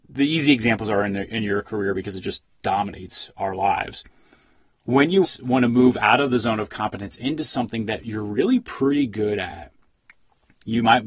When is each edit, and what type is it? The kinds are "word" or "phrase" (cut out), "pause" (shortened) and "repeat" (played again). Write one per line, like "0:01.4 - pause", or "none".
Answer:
0:05.2 - word